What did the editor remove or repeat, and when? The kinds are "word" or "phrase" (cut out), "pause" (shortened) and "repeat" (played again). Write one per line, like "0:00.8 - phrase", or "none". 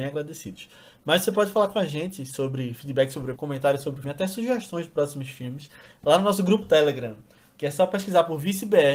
0:03.4 - word
0:04.0 - word
0:06.6 - word